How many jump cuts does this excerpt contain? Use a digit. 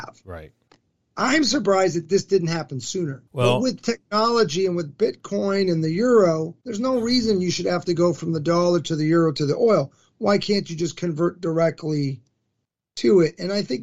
2